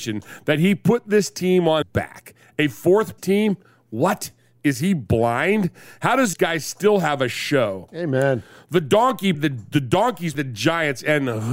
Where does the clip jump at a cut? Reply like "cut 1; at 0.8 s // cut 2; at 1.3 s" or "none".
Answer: cut 1; at 1.8 s // cut 2; at 3.2 s // cut 3; at 6.3 s // cut 4; at 9.3 s // cut 5; at 10.3 s